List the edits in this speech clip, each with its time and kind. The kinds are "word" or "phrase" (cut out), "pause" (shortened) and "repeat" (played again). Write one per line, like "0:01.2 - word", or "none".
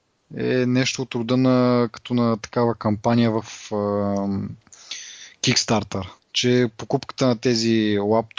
0:06.2 - pause